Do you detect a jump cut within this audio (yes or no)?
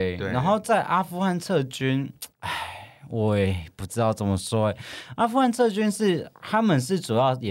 yes